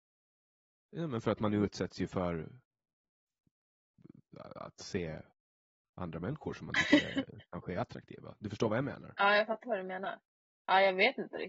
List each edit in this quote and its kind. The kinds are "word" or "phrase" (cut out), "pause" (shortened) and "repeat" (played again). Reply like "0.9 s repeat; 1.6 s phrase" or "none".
none